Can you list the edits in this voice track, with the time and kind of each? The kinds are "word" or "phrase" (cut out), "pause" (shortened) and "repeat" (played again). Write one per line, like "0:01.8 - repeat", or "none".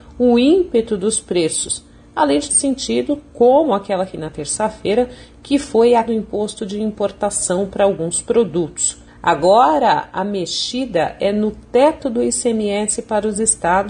0:02.5 - phrase
0:04.1 - phrase
0:06.1 - word
0:09.1 - pause